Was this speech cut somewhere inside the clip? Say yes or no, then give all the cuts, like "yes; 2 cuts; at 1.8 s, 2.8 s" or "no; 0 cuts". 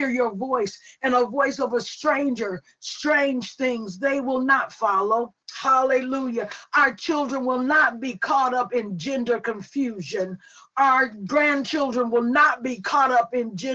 yes; 1 cut; at 5.4 s